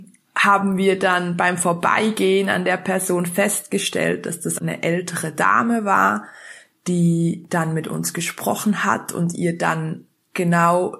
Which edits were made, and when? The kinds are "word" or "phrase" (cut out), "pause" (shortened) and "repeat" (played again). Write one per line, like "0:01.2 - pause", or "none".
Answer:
0:04.6 - word